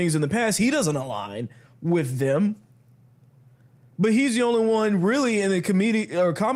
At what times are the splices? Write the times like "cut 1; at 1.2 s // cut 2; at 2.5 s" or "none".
none